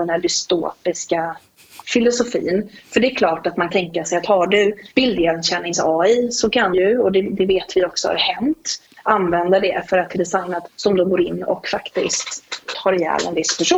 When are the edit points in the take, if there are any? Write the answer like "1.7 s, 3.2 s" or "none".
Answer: 3.7 s, 4.9 s, 6.7 s, 10.1 s, 10.7 s, 12.7 s

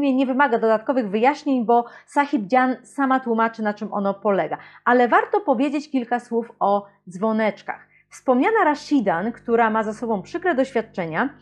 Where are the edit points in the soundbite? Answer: none

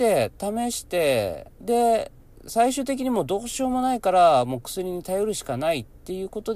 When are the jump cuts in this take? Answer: 1.5 s

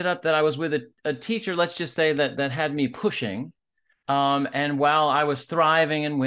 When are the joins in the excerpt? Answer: none

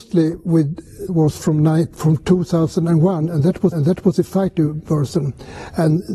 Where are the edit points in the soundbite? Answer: 1.1 s, 3.7 s

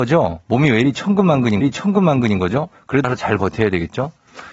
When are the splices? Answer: 1.6 s, 3.0 s

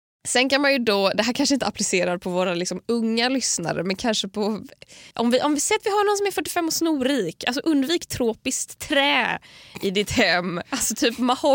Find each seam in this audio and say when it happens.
5.1 s

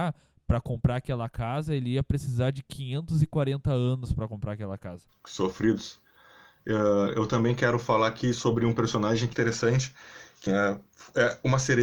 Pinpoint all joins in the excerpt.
9.3 s, 10.5 s

